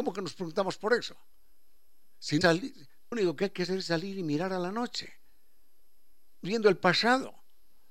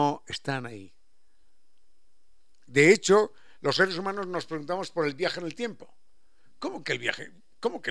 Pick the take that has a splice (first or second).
first